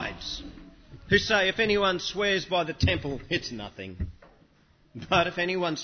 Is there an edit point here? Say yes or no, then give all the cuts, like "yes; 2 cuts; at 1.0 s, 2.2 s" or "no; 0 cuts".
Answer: no; 0 cuts